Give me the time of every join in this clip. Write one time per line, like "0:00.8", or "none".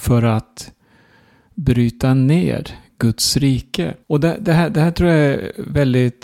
0:04.0